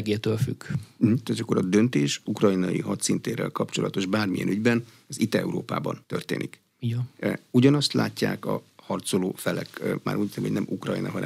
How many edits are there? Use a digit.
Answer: 2